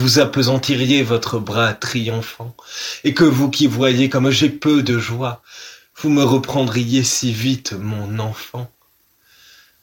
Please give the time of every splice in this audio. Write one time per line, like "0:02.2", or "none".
none